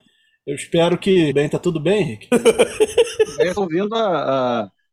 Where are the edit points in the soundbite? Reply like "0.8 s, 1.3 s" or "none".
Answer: 1.3 s, 3.6 s